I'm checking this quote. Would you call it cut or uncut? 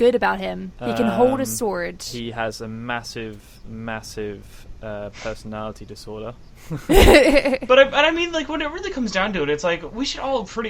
uncut